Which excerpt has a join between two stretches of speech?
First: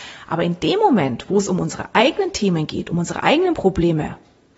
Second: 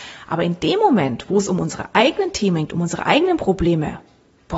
second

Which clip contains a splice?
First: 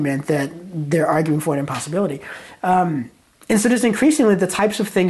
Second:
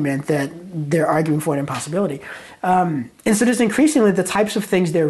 second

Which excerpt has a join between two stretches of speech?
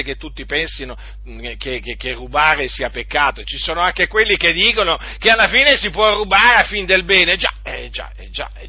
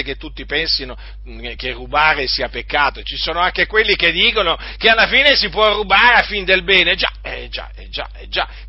second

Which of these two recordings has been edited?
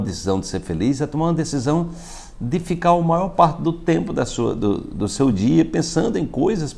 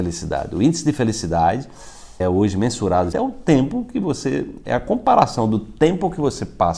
second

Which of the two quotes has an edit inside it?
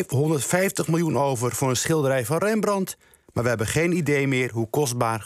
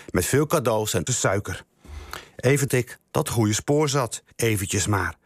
second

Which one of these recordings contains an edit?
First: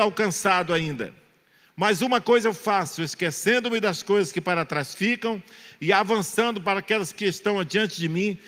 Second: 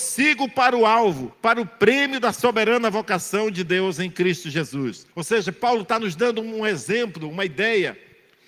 second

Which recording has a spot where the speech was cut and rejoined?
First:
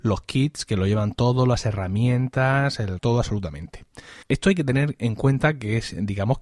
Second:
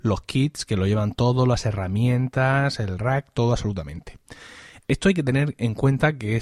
first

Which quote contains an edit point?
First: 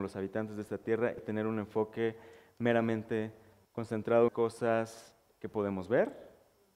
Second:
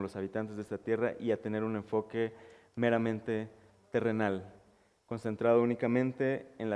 first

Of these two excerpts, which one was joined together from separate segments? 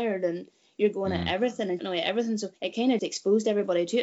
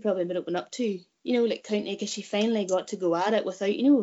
first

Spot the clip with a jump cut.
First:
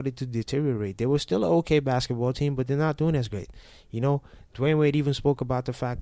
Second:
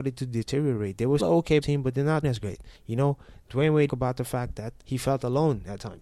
second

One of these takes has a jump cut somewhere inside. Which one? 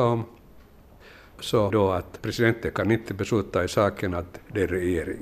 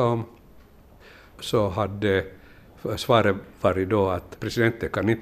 first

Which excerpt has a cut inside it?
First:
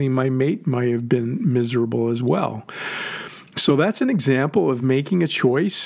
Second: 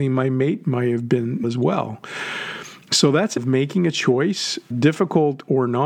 second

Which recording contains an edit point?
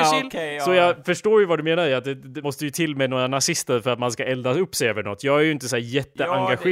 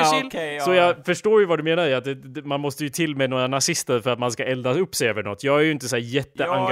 first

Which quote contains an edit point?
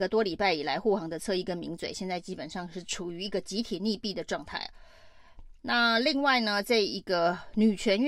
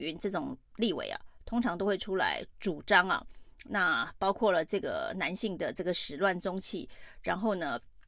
first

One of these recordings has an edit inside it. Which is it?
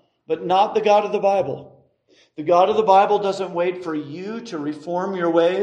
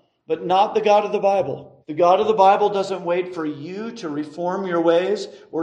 second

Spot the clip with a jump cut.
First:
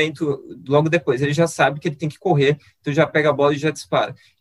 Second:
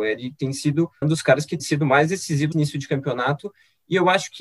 second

